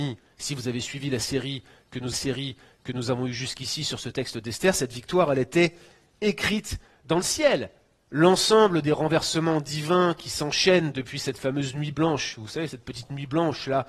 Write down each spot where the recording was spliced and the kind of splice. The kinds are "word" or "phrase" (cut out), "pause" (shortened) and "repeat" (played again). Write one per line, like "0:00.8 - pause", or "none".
0:02.1 - repeat